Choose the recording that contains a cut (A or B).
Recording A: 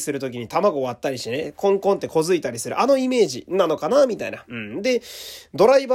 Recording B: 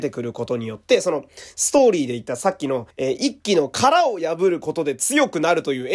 B